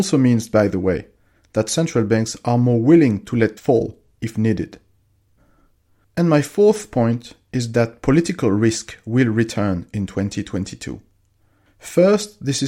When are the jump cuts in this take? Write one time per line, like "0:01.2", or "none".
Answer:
0:03.6